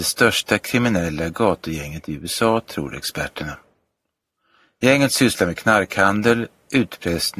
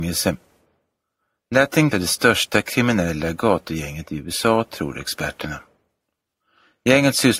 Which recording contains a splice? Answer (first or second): second